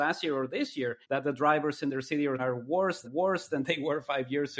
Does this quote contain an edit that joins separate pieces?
yes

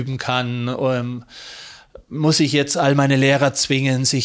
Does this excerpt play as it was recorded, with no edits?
yes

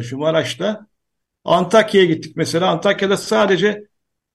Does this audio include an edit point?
no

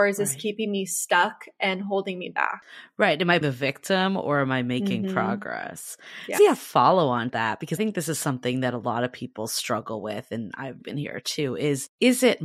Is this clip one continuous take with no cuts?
no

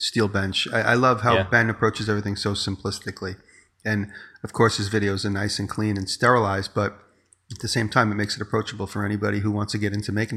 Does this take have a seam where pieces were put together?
no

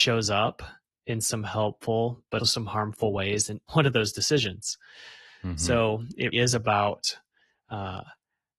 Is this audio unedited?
no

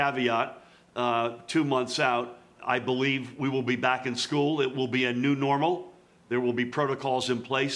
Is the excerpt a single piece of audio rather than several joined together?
no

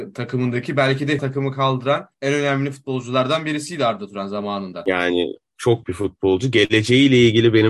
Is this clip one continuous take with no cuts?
no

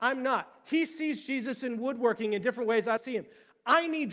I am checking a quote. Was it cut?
yes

